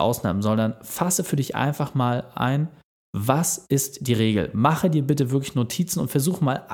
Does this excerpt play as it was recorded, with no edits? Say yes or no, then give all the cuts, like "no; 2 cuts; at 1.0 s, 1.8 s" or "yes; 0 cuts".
yes; 0 cuts